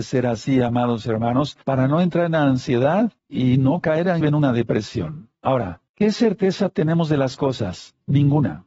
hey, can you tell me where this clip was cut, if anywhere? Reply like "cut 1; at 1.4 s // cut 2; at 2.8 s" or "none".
cut 1; at 1.6 s // cut 2; at 3.2 s // cut 3; at 4.2 s // cut 4; at 5.9 s